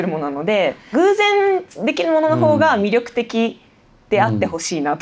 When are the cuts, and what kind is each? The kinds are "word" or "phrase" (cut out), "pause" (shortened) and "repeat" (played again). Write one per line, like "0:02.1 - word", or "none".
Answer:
0:00.9 - word